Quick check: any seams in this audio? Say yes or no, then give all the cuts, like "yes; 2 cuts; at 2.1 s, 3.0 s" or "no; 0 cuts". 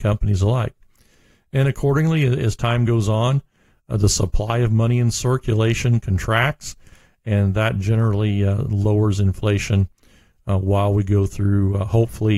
no; 0 cuts